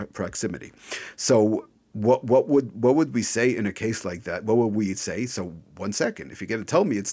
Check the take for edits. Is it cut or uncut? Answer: uncut